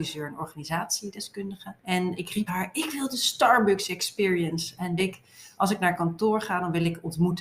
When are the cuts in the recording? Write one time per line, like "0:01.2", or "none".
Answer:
0:01.8
0:02.5
0:05.0